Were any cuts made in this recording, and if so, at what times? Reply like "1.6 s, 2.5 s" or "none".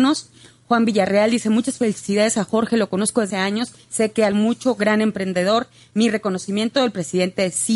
3.3 s, 4.3 s